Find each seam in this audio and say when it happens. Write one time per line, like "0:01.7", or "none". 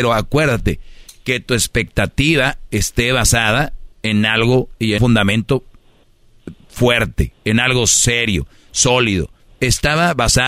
0:03.9
0:05.0